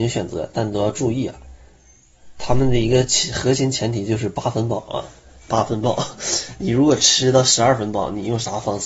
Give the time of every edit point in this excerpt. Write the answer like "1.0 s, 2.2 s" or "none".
none